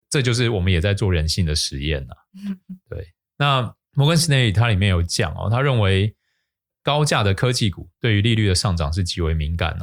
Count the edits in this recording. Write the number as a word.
one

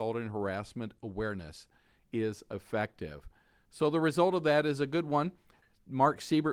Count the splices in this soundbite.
zero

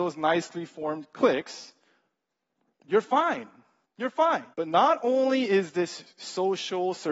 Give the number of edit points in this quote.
two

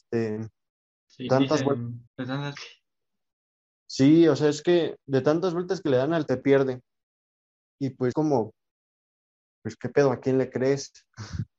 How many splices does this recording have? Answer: five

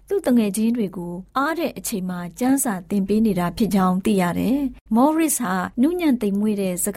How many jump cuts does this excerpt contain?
three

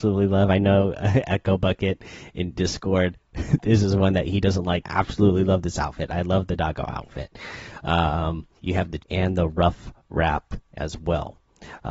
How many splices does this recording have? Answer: three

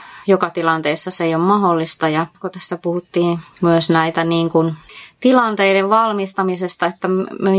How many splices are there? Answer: one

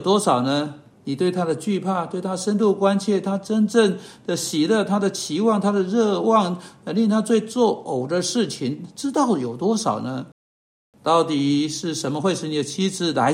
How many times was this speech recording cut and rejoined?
zero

